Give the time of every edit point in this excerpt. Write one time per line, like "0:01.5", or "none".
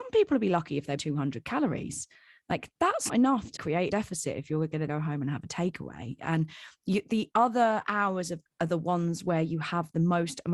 0:01.0
0:03.1
0:03.6
0:03.9
0:04.9
0:08.5